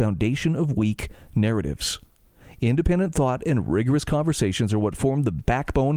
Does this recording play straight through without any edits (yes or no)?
yes